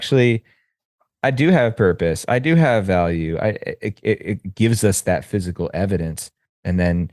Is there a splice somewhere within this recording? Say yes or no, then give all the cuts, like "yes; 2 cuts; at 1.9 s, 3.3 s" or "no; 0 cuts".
no; 0 cuts